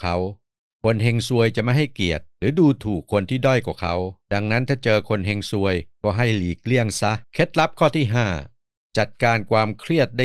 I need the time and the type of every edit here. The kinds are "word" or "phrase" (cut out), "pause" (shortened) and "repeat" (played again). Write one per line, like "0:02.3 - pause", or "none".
0:02.3 - pause
0:04.2 - pause
0:05.9 - pause
0:07.2 - pause